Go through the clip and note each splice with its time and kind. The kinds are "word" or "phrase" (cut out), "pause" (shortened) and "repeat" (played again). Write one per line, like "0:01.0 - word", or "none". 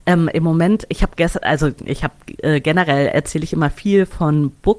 none